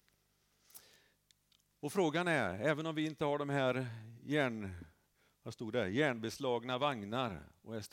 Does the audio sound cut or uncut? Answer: uncut